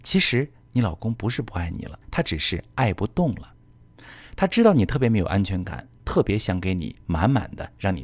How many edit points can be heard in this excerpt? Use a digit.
1